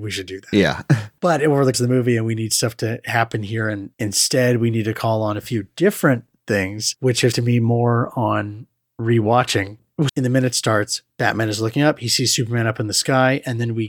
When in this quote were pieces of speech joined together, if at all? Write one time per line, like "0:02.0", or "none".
0:01.7
0:07.3
0:10.1